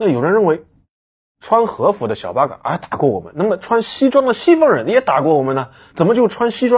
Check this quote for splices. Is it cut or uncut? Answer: uncut